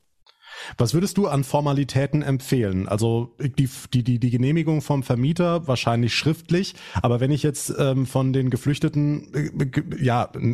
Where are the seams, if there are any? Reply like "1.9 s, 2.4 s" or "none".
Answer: none